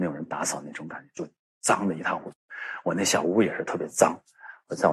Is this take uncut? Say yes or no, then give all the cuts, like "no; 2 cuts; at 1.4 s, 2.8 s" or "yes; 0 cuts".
yes; 0 cuts